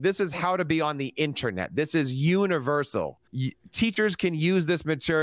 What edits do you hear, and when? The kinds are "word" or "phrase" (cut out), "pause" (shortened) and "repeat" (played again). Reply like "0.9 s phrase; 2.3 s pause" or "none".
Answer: 3.3 s pause